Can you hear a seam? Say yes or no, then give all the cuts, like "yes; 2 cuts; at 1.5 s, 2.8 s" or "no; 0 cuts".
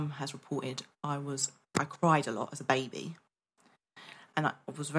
no; 0 cuts